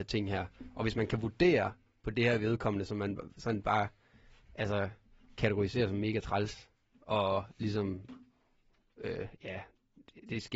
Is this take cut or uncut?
uncut